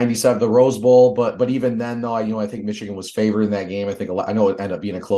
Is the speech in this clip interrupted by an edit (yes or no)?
no